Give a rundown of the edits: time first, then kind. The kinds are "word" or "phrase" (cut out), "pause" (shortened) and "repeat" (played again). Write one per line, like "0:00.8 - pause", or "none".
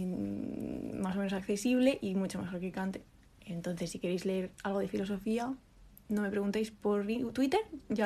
none